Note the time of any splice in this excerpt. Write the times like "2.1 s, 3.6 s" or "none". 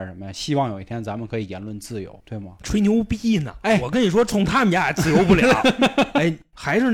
2.2 s